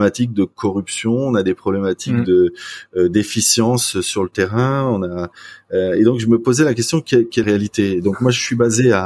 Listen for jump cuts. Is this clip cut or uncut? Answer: cut